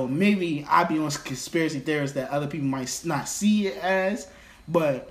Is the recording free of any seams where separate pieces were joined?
yes; 0 cuts

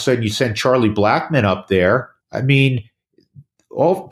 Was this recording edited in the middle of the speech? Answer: yes; 1 cut; at 2.2 s

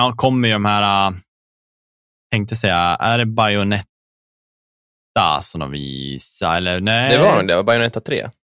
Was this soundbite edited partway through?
no; 0 cuts

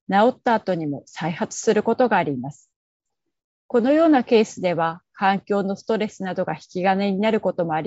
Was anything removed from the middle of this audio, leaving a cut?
no; 0 cuts

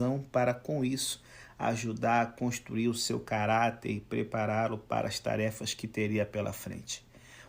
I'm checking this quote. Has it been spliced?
no; 0 cuts

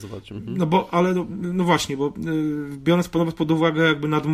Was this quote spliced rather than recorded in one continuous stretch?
no; 0 cuts

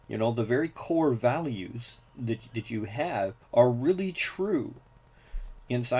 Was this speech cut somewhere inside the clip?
yes; 1 cut; at 3.4 s

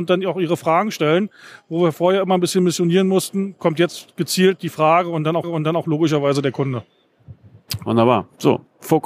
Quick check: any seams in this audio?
yes; 1 cut; at 5.4 s

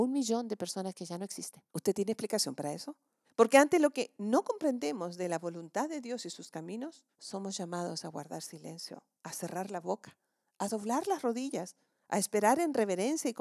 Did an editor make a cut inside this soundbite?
yes; 3 cuts; at 1.7 s, 3.2 s, 7.1 s

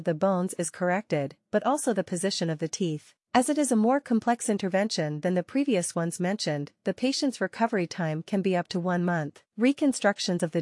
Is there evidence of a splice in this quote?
yes; 2 cuts; at 3.2 s, 9.5 s

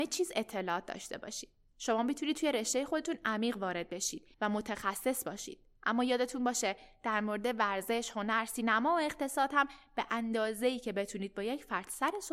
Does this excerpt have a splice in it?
yes; 3 cuts; at 1.7 s, 4.3 s, 5.8 s

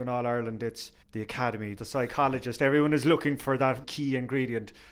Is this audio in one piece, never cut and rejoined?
no; 3 cuts; at 1.0 s, 1.8 s, 3.8 s

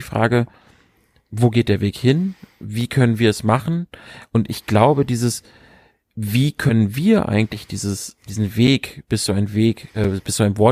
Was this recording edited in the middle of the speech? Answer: no; 0 cuts

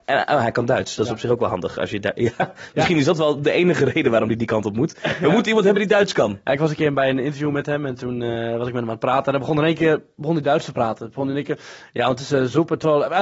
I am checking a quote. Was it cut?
no; 0 cuts

